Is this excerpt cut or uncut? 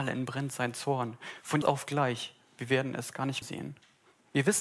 cut